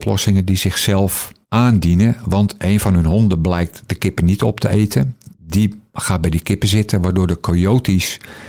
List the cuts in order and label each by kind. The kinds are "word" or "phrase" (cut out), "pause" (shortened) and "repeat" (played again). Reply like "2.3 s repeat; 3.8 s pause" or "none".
1.4 s pause; 5.3 s pause